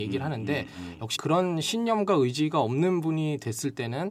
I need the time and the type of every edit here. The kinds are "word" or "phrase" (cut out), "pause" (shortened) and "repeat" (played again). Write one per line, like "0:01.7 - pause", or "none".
0:01.1 - word